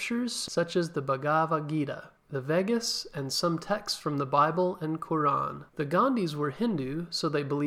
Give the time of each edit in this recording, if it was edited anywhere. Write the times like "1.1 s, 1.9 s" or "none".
5.7 s